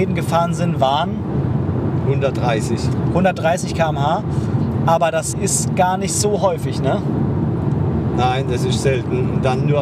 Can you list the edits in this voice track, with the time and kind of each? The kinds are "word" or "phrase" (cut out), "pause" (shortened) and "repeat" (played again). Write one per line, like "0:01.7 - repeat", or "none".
0:05.3 - word